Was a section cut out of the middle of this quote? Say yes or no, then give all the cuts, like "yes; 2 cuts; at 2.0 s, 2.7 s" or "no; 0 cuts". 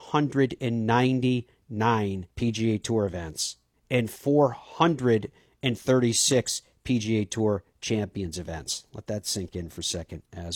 yes; 2 cuts; at 2.3 s, 3.7 s